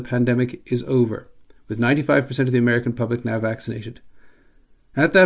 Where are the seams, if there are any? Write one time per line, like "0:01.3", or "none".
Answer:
none